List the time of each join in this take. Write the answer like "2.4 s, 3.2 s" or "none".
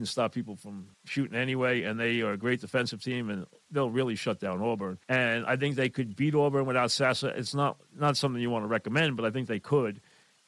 0.9 s, 5.0 s